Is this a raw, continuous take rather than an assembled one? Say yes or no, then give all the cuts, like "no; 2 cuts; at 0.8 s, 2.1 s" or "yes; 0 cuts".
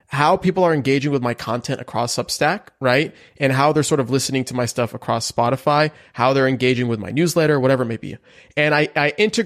yes; 0 cuts